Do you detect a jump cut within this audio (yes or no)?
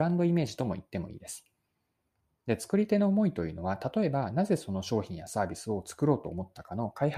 no